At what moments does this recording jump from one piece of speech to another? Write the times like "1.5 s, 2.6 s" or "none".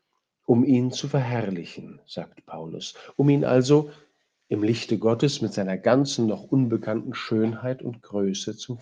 none